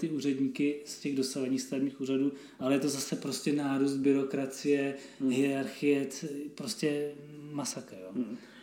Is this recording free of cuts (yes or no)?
yes